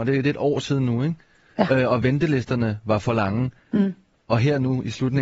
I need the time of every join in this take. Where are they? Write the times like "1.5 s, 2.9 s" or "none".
none